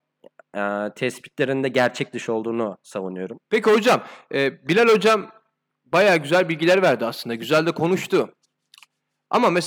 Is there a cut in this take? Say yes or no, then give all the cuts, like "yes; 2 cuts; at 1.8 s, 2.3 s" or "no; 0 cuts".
yes; 2 cuts; at 3.4 s, 5.7 s